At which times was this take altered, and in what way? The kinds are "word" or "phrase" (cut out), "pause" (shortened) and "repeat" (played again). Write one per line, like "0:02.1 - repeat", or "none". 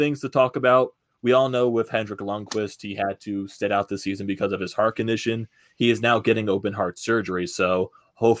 none